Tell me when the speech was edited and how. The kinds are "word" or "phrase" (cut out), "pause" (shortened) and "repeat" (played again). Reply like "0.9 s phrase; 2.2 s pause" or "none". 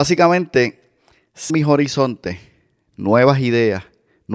1.5 s word